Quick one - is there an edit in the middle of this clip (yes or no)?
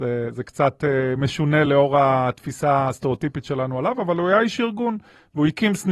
no